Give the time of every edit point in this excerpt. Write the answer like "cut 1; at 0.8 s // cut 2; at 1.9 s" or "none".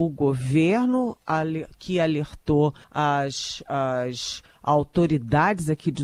cut 1; at 2.8 s